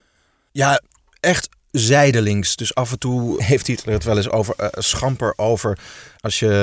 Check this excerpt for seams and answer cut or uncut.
cut